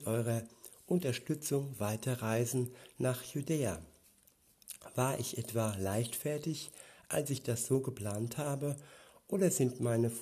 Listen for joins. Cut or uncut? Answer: uncut